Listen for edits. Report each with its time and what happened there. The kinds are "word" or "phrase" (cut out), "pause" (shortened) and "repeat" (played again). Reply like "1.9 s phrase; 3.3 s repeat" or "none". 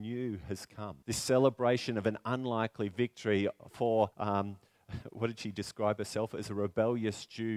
1.0 s pause; 4.1 s pause